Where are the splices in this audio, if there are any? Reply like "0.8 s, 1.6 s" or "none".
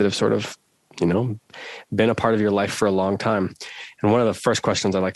none